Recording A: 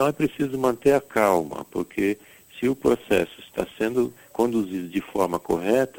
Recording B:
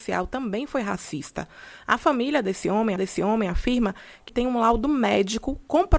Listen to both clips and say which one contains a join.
B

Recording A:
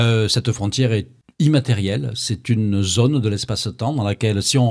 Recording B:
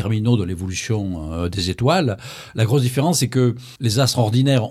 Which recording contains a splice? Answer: B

